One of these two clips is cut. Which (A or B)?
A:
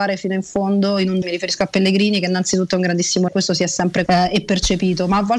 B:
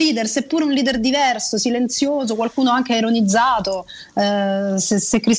A